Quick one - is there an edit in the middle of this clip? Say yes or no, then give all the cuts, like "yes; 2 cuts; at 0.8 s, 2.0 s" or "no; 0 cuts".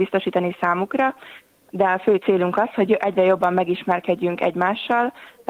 no; 0 cuts